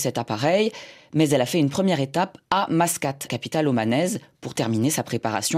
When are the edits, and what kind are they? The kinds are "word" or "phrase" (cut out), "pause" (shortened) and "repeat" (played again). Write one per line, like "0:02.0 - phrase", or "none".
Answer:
0:03.3 - word